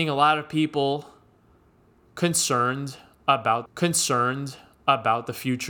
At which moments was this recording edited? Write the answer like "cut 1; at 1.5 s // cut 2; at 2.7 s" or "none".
cut 1; at 3.7 s